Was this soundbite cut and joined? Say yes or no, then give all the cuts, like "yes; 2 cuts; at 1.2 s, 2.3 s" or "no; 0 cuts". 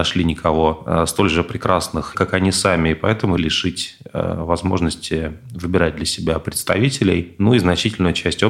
yes; 2 cuts; at 2.1 s, 3.4 s